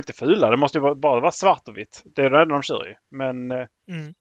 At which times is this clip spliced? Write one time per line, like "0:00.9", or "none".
none